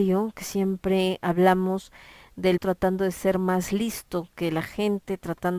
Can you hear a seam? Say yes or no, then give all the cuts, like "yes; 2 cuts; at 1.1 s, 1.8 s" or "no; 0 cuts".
yes; 1 cut; at 2.6 s